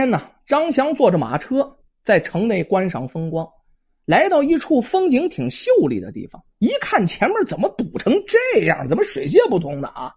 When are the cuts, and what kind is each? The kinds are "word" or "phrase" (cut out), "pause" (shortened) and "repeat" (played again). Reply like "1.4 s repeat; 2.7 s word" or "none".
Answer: 6.5 s pause